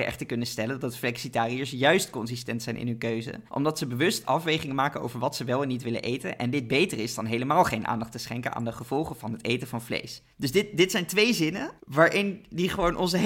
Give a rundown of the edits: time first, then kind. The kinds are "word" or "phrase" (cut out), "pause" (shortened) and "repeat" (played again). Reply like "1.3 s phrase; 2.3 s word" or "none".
3.5 s pause; 10.3 s pause; 11.8 s pause